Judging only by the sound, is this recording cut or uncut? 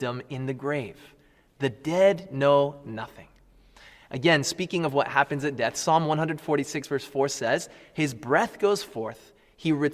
uncut